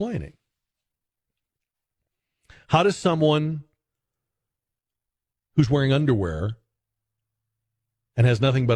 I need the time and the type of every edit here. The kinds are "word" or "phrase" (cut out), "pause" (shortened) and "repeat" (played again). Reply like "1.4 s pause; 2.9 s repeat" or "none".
none